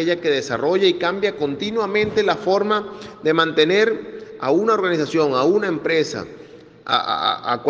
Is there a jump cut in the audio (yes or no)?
no